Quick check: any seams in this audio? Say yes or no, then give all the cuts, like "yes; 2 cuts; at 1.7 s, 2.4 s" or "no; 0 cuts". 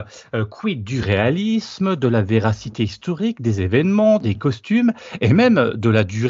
no; 0 cuts